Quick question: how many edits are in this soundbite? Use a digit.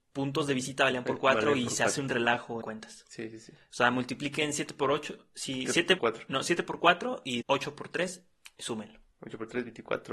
4